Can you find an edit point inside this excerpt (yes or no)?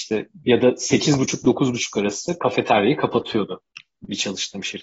no